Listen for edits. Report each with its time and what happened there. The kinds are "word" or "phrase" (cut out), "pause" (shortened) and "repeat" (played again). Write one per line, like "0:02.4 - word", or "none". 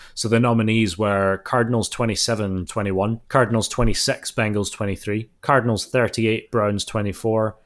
0:02.7 - word
0:03.2 - pause
0:05.4 - pause